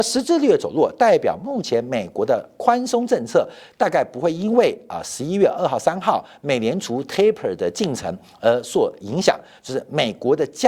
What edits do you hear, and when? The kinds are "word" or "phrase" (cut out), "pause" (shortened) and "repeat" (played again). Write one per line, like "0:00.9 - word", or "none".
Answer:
none